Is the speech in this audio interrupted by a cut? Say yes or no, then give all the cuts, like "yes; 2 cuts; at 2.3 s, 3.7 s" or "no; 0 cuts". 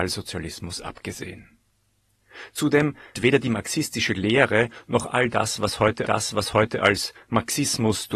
yes; 2 cuts; at 3.1 s, 6.0 s